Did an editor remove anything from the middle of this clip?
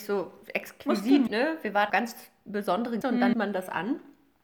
yes; 4 cuts; at 1.3 s, 1.9 s, 3.0 s, 3.3 s

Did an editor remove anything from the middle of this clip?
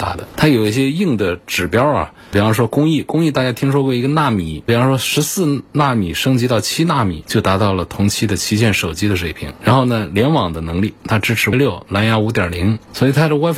yes; 1 cut; at 11.5 s

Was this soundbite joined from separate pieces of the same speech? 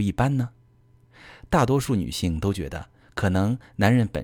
no; 0 cuts

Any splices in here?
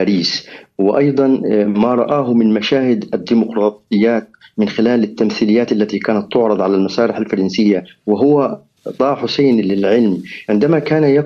no; 0 cuts

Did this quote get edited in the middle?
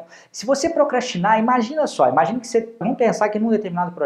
yes; 1 cut; at 2.8 s

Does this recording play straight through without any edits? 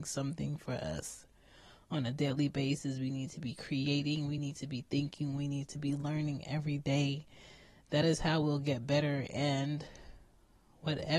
yes; 0 cuts

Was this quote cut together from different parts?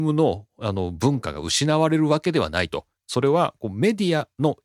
yes; 1 cut; at 3.0 s

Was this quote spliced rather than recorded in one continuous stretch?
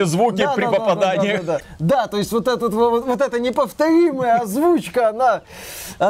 no; 0 cuts

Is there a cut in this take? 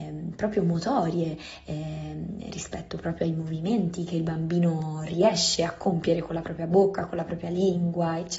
no; 0 cuts

